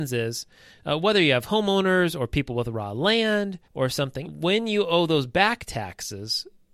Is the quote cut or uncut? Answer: cut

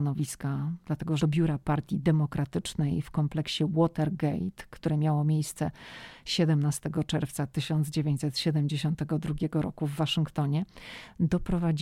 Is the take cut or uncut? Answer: cut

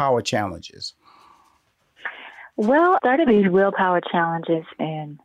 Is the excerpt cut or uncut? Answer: cut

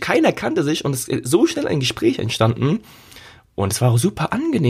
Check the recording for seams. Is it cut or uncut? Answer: uncut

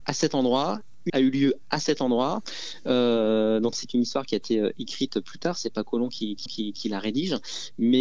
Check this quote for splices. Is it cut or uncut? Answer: cut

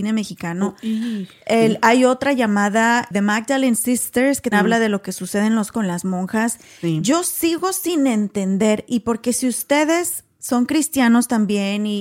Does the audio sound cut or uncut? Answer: cut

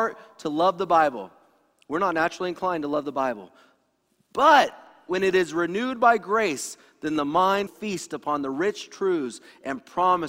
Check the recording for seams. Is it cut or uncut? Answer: cut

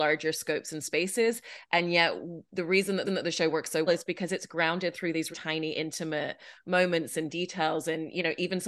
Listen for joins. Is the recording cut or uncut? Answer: cut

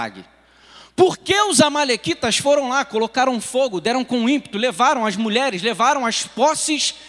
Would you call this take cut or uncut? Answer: uncut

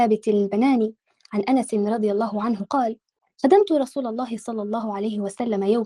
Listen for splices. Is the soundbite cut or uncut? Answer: uncut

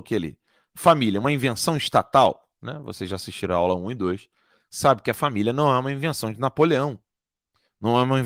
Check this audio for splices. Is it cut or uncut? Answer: uncut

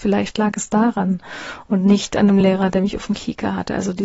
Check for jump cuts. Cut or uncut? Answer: uncut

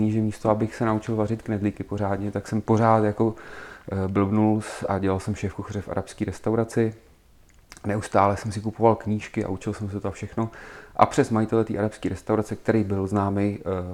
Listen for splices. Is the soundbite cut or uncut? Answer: uncut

